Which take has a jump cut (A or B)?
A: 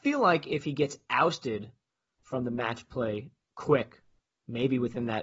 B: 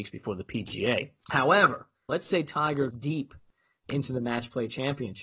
B